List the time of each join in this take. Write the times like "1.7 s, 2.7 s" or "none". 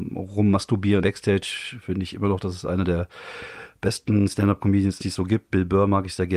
1.0 s, 5.0 s